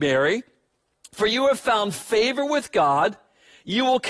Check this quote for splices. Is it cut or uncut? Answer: uncut